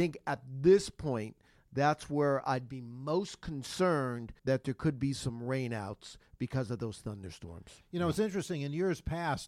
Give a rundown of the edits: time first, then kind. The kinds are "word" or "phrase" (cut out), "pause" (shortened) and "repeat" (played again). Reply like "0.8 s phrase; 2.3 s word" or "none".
4.4 s pause